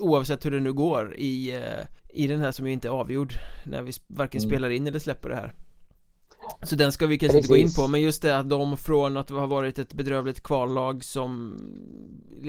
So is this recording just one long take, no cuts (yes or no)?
no